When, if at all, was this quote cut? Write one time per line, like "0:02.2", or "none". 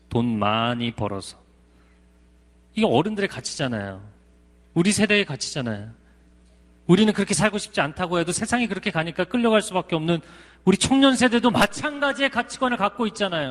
none